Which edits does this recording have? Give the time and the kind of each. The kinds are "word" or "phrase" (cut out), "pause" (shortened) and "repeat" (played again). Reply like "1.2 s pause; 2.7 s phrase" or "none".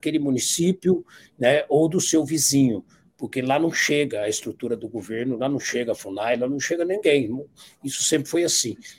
none